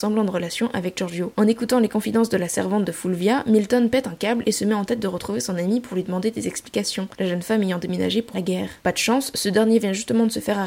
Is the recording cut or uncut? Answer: cut